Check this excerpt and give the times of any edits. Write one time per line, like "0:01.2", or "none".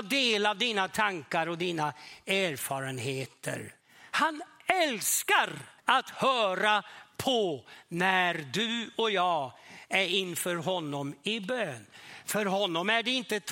0:03.8
0:05.8